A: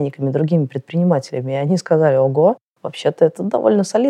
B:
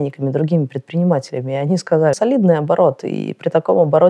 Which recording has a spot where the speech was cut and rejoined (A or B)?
B